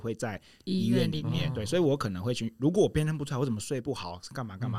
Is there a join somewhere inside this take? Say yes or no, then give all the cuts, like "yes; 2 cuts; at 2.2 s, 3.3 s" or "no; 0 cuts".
yes; 1 cut; at 1.5 s